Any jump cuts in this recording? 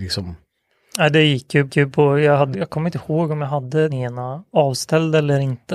yes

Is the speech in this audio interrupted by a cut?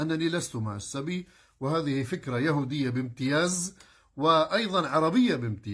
no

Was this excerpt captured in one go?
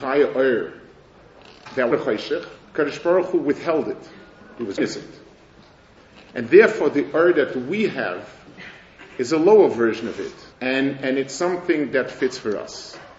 no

